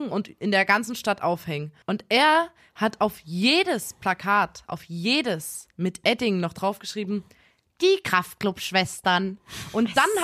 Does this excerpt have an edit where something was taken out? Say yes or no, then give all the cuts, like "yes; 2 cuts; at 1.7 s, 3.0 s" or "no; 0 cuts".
yes; 1 cut; at 1.8 s